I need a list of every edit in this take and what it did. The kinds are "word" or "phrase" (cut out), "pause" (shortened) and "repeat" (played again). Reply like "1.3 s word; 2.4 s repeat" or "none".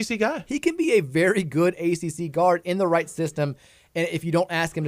none